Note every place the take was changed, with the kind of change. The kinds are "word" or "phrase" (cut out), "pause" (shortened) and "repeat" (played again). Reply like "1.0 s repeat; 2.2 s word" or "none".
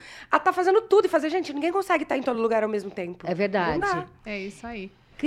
none